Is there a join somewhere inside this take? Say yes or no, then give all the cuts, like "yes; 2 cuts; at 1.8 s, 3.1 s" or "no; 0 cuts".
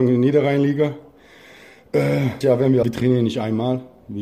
yes; 2 cuts; at 2.4 s, 2.8 s